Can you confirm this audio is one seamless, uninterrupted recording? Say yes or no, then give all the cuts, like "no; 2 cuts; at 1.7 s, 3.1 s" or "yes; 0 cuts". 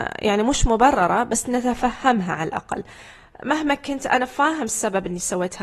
yes; 0 cuts